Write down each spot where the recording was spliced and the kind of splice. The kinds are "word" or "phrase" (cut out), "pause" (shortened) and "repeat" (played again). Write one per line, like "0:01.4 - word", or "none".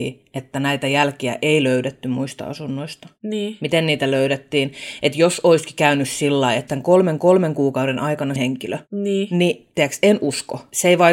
0:06.7 - phrase
0:07.2 - repeat
0:08.4 - phrase